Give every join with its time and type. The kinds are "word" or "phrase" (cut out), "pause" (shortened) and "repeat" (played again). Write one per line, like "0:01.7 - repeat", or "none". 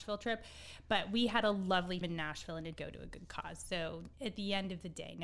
0:02.0 - word
0:02.8 - word
0:04.1 - pause